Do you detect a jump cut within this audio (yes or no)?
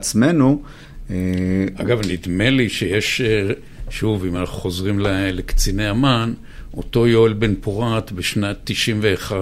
no